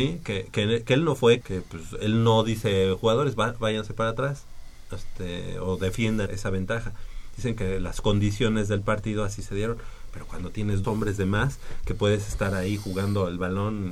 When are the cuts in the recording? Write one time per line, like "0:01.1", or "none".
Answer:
0:01.4
0:06.3
0:10.8